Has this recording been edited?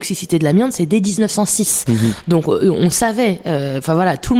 no; 0 cuts

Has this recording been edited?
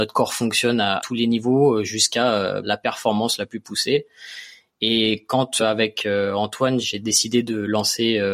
yes; 4 cuts; at 1.0 s, 2.6 s, 5.6 s, 6.8 s

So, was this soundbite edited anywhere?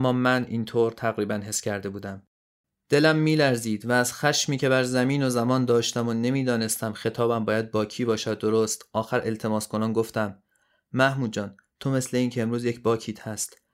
no; 0 cuts

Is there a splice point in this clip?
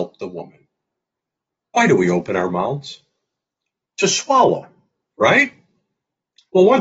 no; 0 cuts

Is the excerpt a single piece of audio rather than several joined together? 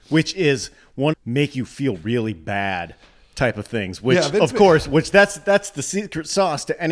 no; 1 cut; at 1.1 s

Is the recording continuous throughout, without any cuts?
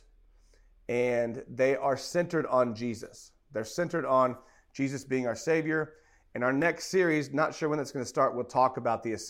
yes; 0 cuts

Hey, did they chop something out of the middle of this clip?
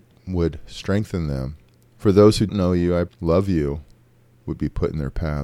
yes; 3 cuts; at 1.8 s, 2.5 s, 3.1 s

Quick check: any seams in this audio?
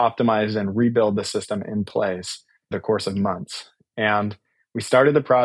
yes; 1 cut; at 2.7 s

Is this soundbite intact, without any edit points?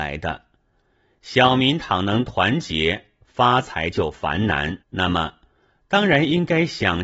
no; 1 cut; at 4.8 s

